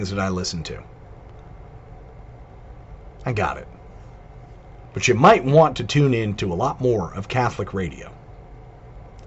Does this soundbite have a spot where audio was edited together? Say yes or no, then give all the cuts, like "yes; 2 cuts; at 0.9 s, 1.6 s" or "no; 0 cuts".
no; 0 cuts